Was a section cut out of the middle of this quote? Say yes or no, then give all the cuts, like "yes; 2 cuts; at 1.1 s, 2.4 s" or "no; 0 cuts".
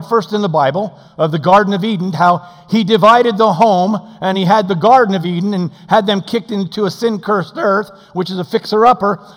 no; 0 cuts